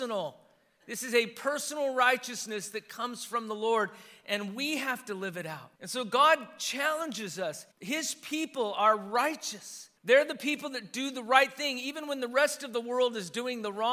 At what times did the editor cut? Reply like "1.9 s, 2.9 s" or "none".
5.8 s, 7.7 s, 10.0 s